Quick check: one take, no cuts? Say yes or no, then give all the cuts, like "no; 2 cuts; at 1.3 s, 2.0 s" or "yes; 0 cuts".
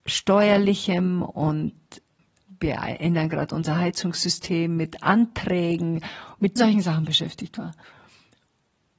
no; 1 cut; at 6.6 s